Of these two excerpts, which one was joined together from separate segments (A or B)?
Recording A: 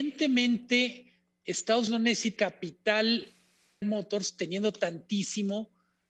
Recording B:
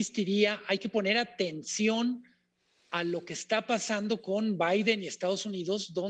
A